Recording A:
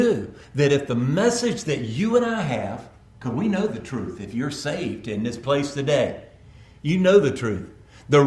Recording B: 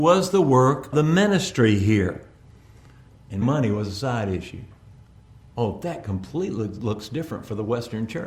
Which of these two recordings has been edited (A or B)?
B